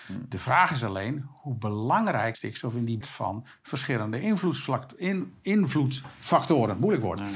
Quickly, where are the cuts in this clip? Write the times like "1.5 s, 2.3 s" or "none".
2.3 s, 3.0 s